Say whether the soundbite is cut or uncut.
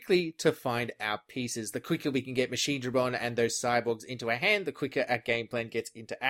uncut